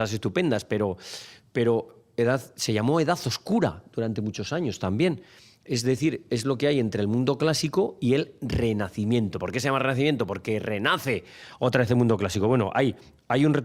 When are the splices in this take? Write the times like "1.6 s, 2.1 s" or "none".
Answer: none